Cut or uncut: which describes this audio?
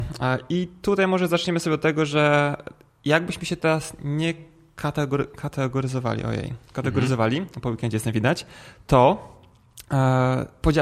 uncut